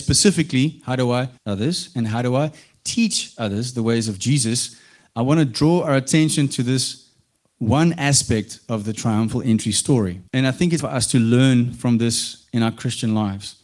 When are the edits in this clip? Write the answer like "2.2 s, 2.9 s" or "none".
1.4 s, 10.3 s, 10.8 s